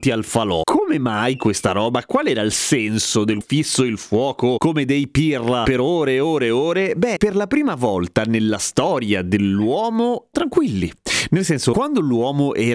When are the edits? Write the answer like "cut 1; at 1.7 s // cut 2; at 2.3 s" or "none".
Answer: cut 1; at 3.4 s // cut 2; at 7.2 s // cut 3; at 10.3 s

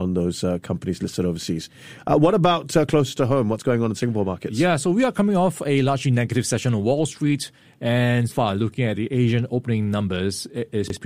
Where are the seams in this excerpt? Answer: cut 1; at 8.3 s

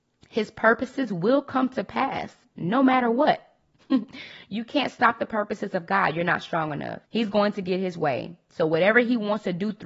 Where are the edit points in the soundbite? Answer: cut 1; at 7.0 s

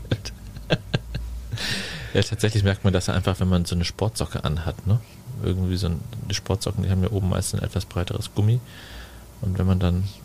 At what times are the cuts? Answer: none

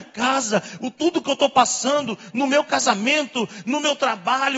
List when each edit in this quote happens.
none

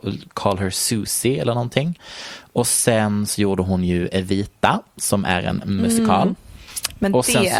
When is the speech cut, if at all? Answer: none

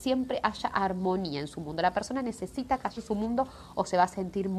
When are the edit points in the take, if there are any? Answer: cut 1; at 3.0 s

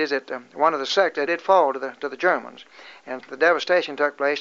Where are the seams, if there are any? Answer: cut 1; at 1.3 s // cut 2; at 3.2 s

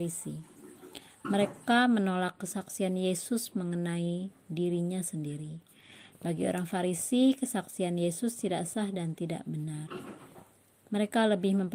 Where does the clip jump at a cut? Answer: none

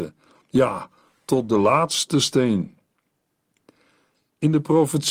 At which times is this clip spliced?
none

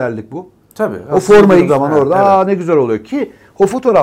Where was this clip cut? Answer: cut 1; at 1.7 s

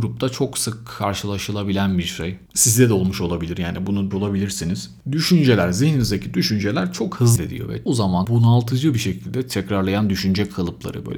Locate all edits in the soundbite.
cut 1; at 4.1 s // cut 2; at 7.4 s // cut 3; at 7.9 s // cut 4; at 8.2 s

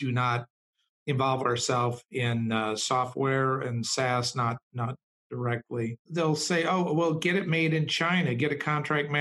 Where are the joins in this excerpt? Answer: cut 1; at 6.0 s

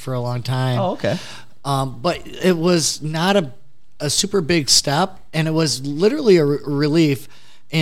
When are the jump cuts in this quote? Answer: none

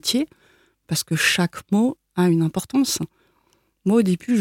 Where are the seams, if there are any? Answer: none

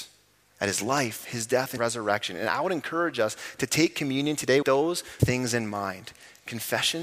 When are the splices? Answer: cut 1; at 1.8 s // cut 2; at 4.6 s // cut 3; at 5.2 s

